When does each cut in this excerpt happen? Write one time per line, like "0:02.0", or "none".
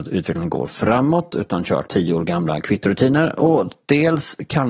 0:01.9